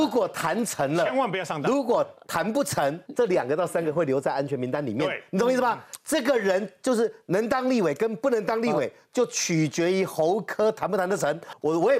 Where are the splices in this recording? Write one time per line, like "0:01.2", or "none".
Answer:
0:03.1

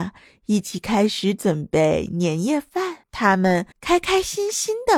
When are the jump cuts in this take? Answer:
0:03.0
0:03.7

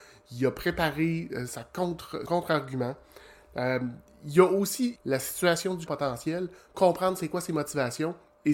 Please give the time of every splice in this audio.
0:01.5
0:02.3
0:05.0
0:05.9
0:06.7

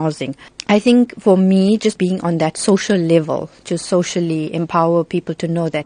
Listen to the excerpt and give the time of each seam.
none

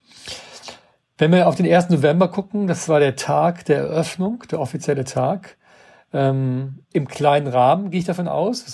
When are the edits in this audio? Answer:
0:06.8

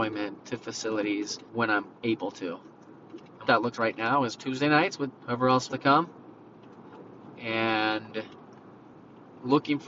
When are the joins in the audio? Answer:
0:01.5
0:02.0
0:03.4
0:03.7
0:04.4
0:05.1
0:05.7

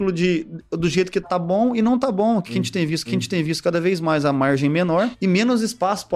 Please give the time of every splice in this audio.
0:01.2
0:03.0

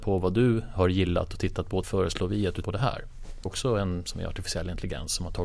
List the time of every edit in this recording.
0:01.8
0:02.6
0:03.5
0:04.1

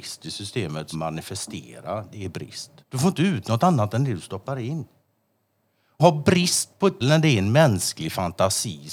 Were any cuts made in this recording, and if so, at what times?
0:00.9
0:02.8
0:06.0
0:07.0

